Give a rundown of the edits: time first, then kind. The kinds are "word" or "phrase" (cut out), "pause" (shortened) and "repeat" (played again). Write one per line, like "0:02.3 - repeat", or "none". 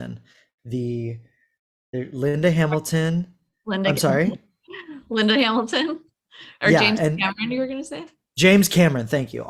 none